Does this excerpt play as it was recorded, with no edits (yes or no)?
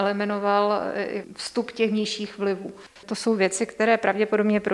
yes